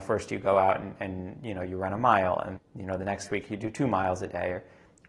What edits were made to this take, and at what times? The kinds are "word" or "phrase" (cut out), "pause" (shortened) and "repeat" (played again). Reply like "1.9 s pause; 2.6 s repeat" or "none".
2.6 s word